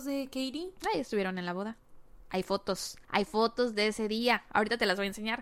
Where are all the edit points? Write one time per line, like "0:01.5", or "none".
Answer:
0:03.0